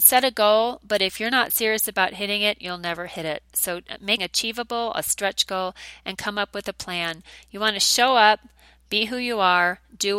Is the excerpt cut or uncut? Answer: cut